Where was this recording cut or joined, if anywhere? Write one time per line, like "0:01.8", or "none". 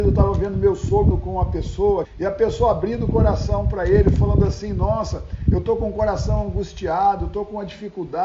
0:01.1
0:02.0